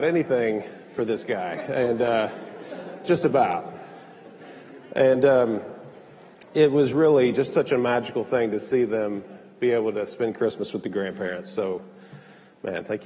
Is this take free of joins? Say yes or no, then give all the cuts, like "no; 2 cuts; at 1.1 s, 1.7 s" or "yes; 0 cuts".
yes; 0 cuts